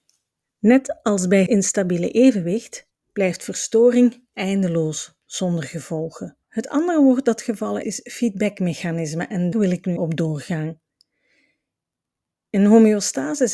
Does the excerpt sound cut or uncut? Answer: cut